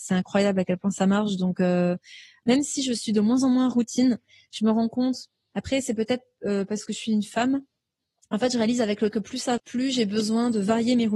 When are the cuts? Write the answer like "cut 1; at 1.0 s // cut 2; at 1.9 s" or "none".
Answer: cut 1; at 9.1 s // cut 2; at 9.6 s